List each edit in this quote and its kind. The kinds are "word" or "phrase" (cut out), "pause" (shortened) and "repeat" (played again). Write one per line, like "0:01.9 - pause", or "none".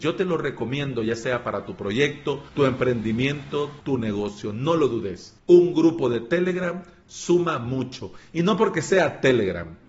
0:02.5 - pause
0:03.8 - pause
0:05.4 - pause